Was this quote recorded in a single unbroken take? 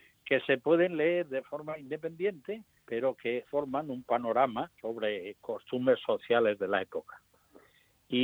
no; 3 cuts; at 2.7 s, 3.4 s, 4.8 s

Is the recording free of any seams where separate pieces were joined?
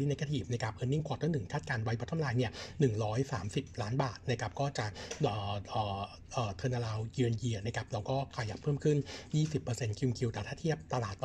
yes; 0 cuts

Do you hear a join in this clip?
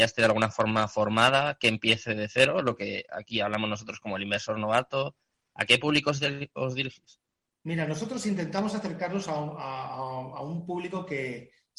no; 0 cuts

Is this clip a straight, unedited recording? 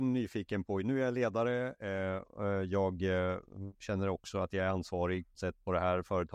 no; 2 cuts; at 3.7 s, 5.3 s

